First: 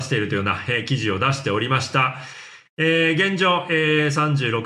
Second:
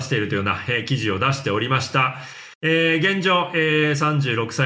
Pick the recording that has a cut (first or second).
second